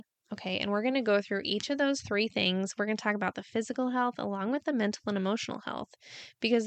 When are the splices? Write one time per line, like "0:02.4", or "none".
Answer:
none